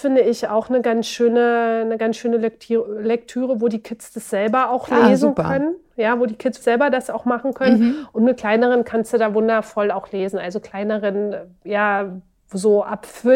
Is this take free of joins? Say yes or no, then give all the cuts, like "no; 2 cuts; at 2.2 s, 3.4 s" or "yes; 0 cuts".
no; 1 cut; at 6.6 s